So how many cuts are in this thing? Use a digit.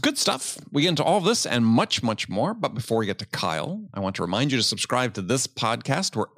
0